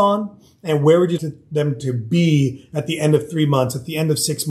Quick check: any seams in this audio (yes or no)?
yes